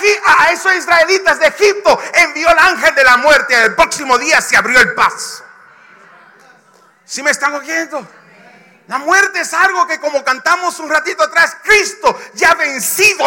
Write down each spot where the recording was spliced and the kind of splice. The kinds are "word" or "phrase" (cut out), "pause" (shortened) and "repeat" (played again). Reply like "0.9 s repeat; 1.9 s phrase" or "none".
none